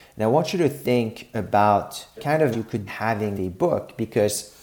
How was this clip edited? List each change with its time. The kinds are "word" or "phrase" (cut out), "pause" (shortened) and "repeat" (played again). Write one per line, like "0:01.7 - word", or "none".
0:02.2 - word
0:02.5 - word
0:02.9 - word
0:03.4 - word